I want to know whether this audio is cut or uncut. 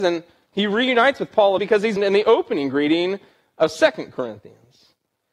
cut